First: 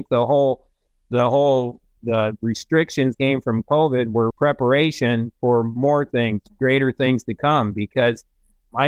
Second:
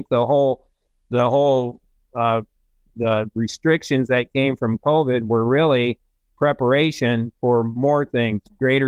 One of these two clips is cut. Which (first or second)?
first